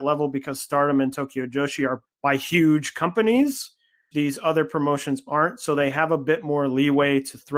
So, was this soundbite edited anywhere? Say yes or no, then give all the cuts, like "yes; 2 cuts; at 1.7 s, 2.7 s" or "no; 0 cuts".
yes; 2 cuts; at 2.0 s, 4.1 s